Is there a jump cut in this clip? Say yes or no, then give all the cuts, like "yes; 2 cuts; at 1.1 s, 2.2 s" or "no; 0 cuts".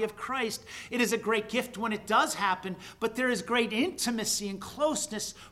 no; 0 cuts